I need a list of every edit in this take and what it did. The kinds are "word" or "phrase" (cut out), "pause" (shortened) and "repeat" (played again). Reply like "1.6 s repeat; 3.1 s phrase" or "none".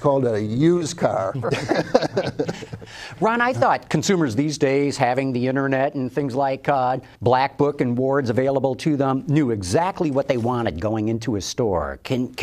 7.1 s pause